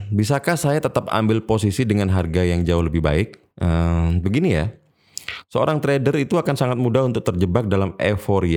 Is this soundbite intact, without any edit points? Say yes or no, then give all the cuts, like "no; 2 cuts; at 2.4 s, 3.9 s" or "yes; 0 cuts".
no; 1 cut; at 3.5 s